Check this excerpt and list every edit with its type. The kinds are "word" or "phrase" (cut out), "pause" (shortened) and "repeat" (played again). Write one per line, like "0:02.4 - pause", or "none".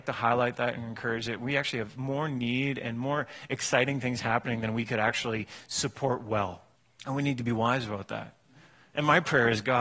0:06.8 - pause